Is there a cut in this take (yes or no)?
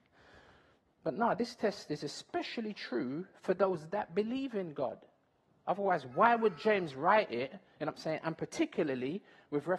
no